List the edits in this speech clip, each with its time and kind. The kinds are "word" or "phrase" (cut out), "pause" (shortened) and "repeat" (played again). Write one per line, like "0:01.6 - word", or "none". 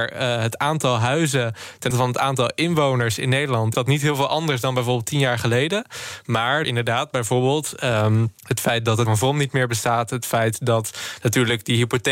0:01.9 - word
0:03.7 - word
0:06.6 - word
0:08.4 - pause
0:09.0 - word